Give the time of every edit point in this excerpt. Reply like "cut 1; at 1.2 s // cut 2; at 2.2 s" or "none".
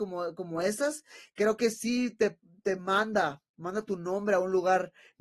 none